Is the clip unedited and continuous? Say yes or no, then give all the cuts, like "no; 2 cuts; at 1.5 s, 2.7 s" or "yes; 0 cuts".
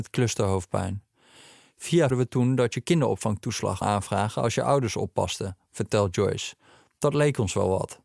no; 2 cuts; at 2.1 s, 3.8 s